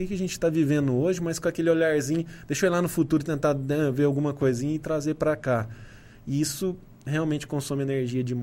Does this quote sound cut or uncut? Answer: uncut